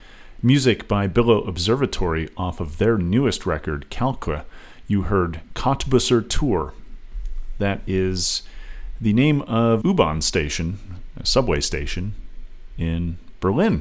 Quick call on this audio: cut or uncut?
cut